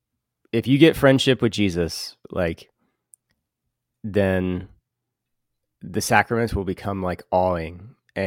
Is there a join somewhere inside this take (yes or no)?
no